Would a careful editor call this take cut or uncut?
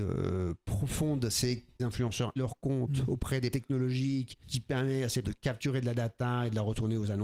cut